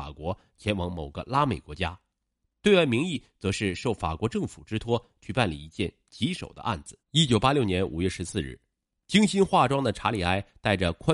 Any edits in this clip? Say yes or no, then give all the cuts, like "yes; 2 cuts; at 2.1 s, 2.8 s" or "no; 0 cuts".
yes; 1 cut; at 7.0 s